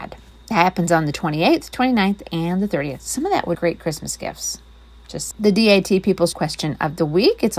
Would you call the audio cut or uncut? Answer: cut